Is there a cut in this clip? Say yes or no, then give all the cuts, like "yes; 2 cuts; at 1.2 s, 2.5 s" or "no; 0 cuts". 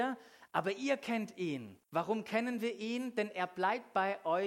yes; 1 cut; at 1.8 s